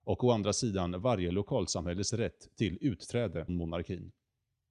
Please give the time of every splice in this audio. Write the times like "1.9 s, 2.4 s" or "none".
3.5 s